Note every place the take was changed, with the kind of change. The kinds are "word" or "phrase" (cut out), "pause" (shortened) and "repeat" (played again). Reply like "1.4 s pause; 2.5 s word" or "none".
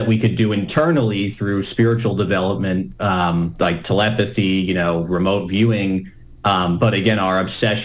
none